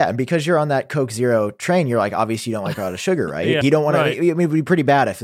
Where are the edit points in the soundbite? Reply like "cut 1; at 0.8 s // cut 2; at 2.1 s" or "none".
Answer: cut 1; at 3.6 s